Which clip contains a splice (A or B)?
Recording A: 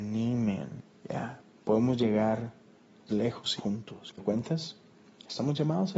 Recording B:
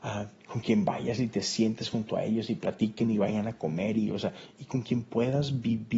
A